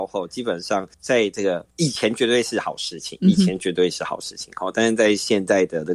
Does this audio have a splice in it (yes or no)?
yes